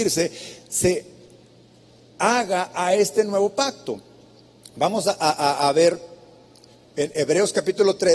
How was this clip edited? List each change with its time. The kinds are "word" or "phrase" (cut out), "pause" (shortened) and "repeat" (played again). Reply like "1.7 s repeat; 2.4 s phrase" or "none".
none